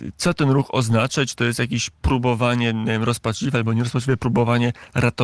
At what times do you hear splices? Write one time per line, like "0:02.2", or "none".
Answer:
none

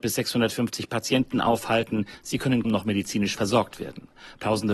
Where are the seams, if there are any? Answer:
0:02.6

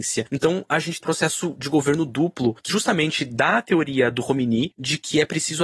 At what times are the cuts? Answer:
0:01.0
0:02.7

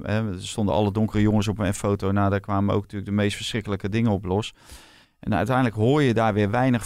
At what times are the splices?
none

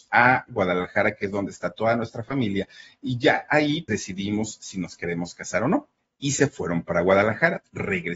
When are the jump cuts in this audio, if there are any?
0:03.9
0:06.0

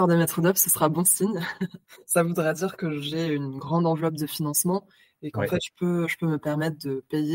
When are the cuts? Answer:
none

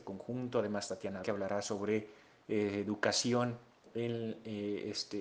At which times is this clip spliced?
0:01.2

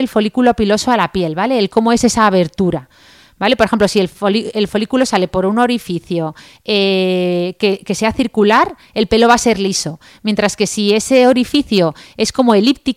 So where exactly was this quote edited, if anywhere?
none

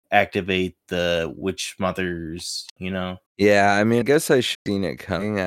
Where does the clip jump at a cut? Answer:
0:02.8
0:03.3
0:04.0
0:04.5

